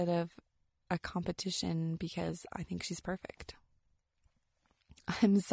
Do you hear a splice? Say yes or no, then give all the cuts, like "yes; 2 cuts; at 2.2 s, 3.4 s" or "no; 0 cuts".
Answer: no; 0 cuts